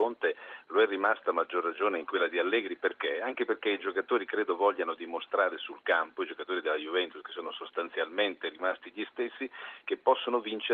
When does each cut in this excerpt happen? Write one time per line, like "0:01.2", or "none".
none